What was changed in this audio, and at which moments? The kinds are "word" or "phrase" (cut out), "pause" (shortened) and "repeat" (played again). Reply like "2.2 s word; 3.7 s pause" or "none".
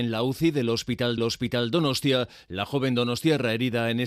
1.2 s repeat